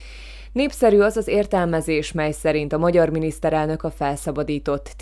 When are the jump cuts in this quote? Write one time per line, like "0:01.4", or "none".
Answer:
none